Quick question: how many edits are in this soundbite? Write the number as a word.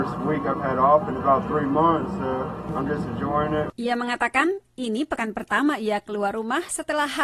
zero